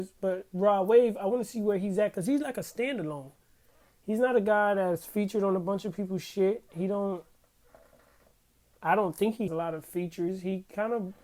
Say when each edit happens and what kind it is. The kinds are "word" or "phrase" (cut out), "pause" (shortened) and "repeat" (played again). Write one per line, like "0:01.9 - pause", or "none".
0:09.5 - word